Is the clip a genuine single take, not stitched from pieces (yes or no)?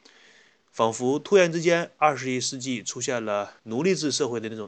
no